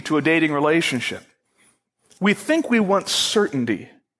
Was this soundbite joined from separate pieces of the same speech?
no; 0 cuts

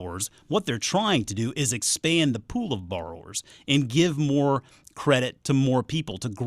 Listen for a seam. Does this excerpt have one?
no; 0 cuts

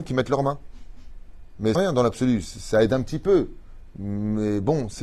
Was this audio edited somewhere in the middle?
yes; 1 cut; at 1.7 s

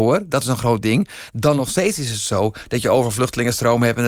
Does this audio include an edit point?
no; 0 cuts

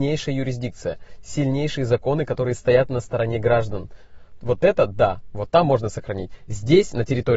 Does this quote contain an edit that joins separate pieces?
no; 0 cuts

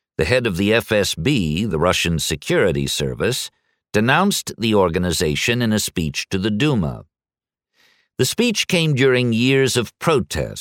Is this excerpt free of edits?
yes; 0 cuts

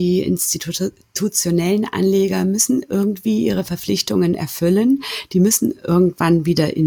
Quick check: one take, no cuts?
yes; 0 cuts

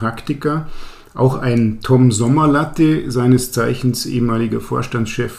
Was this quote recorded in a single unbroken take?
yes; 0 cuts

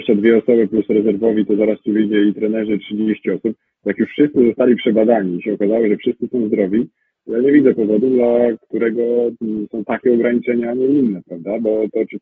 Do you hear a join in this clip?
no; 0 cuts

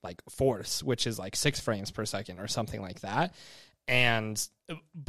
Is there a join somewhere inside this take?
no; 0 cuts

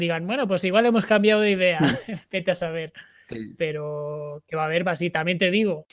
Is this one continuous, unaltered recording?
yes; 0 cuts

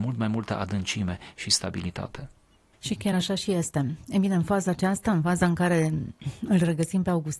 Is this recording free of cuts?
yes; 0 cuts

